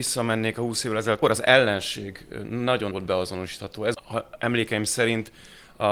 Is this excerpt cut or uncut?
cut